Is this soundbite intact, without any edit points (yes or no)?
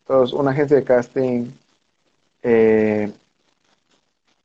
yes